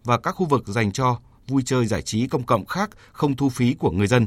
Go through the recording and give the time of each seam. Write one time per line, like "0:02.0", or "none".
none

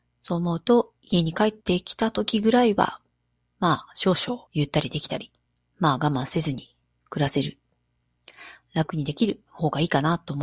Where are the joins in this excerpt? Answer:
0:01.6
0:03.1
0:04.5
0:05.5
0:06.8

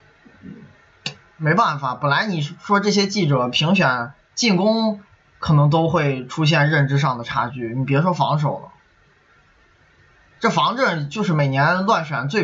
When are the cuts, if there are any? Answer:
none

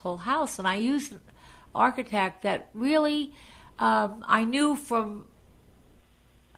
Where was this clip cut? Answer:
none

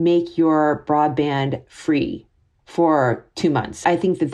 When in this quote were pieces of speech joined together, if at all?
none

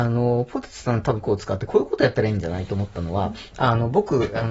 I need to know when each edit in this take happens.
0:01.2

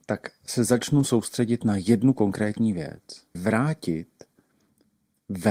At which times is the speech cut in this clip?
0:03.3

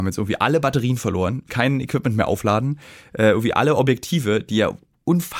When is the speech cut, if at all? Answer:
0:01.5

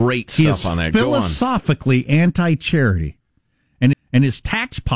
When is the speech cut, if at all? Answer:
0:03.9

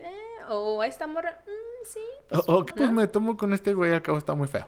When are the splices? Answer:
0:02.7

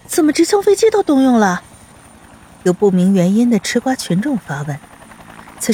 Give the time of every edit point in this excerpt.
0:01.9

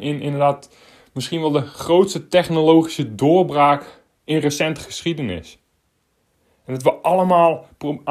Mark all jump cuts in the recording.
none

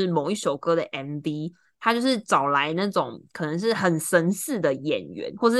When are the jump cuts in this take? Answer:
none

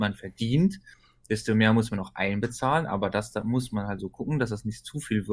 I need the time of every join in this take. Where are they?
0:04.0

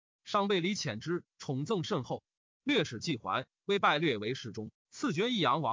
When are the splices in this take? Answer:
none

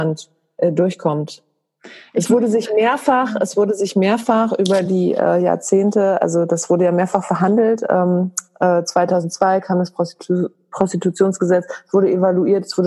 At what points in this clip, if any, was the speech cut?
none

